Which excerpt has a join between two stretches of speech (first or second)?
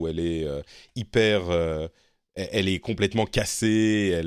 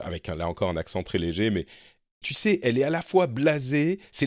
second